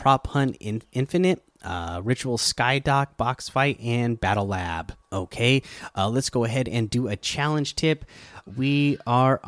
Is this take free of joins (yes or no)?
no